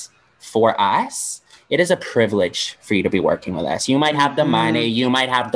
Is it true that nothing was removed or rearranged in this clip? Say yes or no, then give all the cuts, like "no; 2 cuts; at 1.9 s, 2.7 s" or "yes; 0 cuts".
yes; 0 cuts